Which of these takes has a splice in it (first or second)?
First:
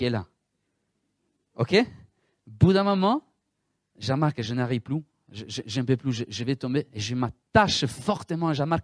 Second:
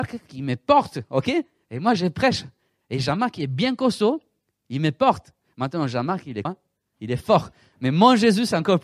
second